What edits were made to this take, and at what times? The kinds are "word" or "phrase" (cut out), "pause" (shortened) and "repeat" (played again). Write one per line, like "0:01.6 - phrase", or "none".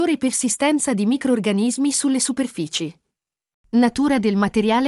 none